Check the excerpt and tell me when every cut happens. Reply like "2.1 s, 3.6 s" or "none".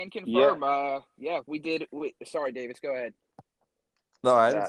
none